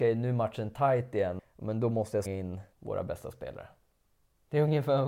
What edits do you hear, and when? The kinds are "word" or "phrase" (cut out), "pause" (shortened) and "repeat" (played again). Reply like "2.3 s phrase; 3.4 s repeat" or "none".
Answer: 1.4 s word; 2.3 s word; 2.7 s pause